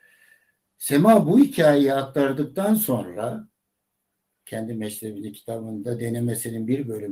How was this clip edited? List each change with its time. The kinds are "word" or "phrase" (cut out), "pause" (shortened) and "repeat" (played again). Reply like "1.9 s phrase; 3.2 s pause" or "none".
none